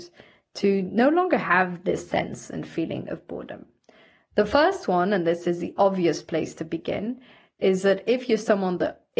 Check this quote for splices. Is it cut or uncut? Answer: uncut